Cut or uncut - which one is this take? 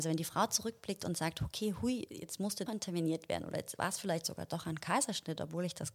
cut